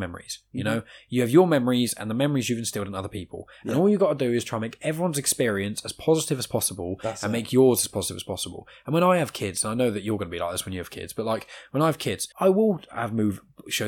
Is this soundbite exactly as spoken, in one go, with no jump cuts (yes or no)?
no